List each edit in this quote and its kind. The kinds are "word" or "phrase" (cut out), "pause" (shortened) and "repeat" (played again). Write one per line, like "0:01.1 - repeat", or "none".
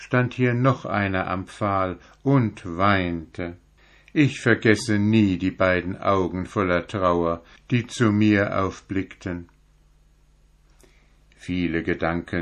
none